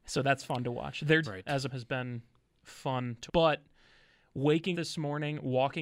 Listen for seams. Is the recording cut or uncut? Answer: cut